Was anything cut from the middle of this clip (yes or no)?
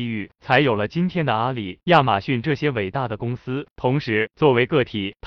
yes